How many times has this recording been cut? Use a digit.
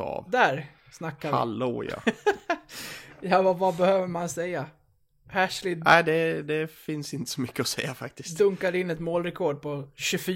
0